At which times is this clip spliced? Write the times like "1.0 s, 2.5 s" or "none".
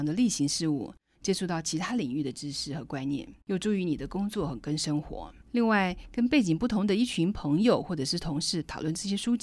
3.4 s, 5.4 s